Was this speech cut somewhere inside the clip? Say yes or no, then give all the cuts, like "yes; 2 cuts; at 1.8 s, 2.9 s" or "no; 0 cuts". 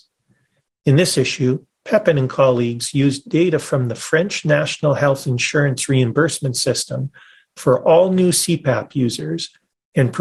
no; 0 cuts